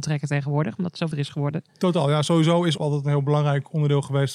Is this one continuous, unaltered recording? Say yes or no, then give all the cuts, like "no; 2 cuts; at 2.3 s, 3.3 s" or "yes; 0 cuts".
no; 2 cuts; at 1.1 s, 2.8 s